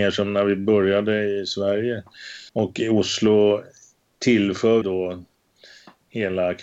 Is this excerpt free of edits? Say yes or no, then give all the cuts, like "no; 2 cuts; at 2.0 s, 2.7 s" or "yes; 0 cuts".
no; 2 cuts; at 2.5 s, 4.8 s